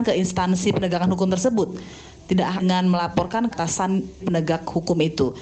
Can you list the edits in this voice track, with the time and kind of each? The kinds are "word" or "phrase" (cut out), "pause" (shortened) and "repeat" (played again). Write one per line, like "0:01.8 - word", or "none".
0:02.6 - phrase
0:03.5 - word
0:04.2 - word

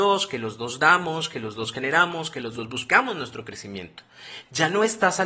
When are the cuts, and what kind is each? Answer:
none

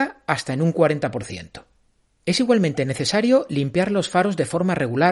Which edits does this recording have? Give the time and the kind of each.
none

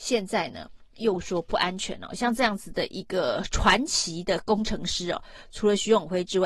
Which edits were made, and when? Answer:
none

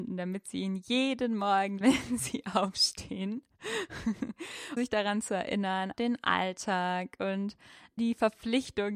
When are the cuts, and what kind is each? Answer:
0:01.8 - word
0:04.8 - word
0:05.9 - word
0:08.0 - word

